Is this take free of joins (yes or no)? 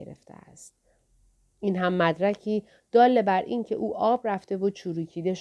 yes